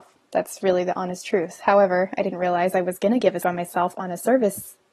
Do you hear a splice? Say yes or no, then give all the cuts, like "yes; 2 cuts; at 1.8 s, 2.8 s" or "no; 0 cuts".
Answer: yes; 1 cut; at 3.4 s